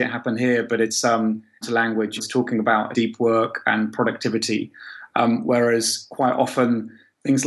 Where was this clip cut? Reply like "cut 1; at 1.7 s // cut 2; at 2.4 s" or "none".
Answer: cut 1; at 1.6 s // cut 2; at 2.2 s // cut 3; at 2.9 s